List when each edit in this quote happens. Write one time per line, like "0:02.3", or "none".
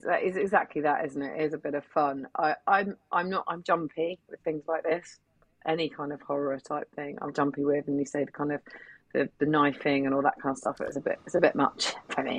0:03.6
0:07.3